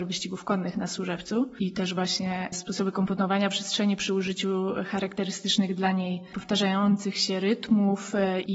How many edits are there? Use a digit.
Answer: 0